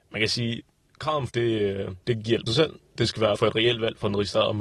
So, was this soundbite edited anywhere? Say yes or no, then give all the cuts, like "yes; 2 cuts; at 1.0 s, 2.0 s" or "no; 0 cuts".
yes; 4 cuts; at 1.3 s, 2.0 s, 2.5 s, 3.4 s